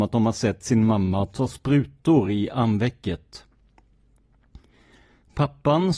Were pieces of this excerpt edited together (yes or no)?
no